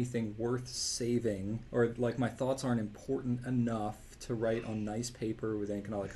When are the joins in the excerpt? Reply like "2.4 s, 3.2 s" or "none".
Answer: 1.7 s